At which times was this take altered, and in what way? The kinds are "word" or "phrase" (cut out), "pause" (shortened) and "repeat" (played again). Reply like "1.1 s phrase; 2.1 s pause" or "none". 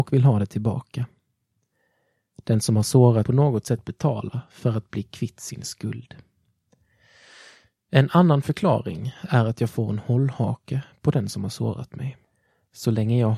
3.3 s phrase